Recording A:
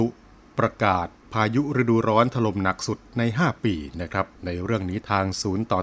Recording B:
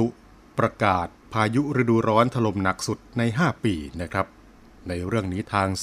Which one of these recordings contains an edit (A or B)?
A